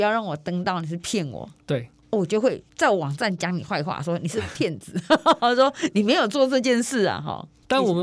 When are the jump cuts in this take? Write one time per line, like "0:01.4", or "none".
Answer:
none